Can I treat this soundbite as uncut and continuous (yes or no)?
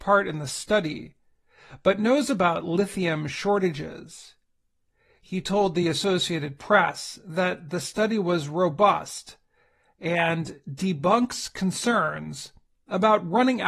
yes